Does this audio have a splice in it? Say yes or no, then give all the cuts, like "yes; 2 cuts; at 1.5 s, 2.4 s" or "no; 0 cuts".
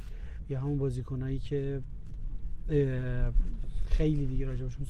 no; 0 cuts